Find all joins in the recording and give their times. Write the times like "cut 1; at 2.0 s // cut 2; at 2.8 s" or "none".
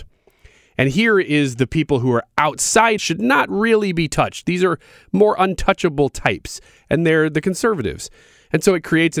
cut 1; at 3.0 s